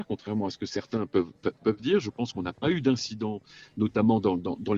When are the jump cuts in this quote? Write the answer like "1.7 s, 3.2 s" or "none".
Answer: none